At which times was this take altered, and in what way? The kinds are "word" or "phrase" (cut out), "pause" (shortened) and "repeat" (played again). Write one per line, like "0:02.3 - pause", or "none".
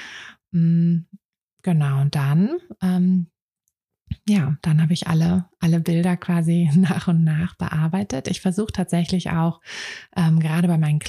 none